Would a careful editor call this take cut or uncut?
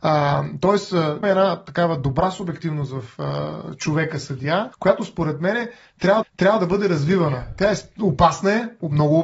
cut